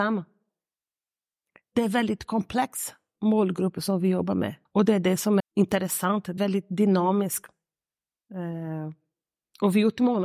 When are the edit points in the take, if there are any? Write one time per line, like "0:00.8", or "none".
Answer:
0:04.7
0:05.4
0:06.4